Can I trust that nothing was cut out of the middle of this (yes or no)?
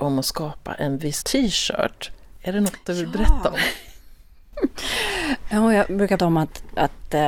no